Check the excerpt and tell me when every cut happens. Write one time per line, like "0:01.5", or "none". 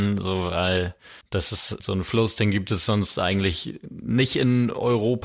0:01.2
0:01.8